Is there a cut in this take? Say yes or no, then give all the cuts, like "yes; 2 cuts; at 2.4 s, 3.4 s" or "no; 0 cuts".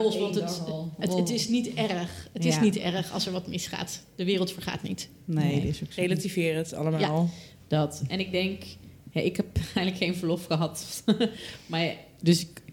no; 0 cuts